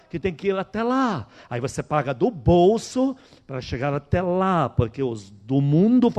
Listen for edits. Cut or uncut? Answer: uncut